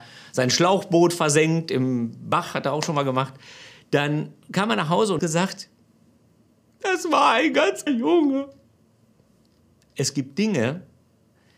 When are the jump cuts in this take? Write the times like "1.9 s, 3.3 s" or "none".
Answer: 5.2 s, 7.9 s